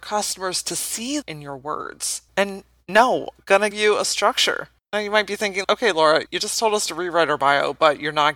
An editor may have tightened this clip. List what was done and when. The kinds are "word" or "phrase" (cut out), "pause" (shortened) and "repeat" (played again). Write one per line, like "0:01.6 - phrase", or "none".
0:01.2 - word
0:02.3 - pause
0:03.4 - phrase
0:03.7 - word
0:04.8 - pause
0:05.6 - word
0:06.3 - word